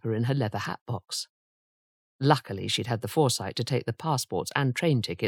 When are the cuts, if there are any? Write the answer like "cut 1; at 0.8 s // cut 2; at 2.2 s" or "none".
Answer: none